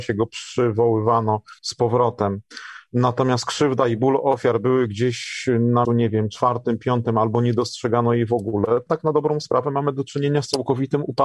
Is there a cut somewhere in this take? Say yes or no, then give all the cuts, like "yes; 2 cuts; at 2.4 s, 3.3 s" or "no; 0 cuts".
yes; 3 cuts; at 1.6 s, 5.8 s, 8.9 s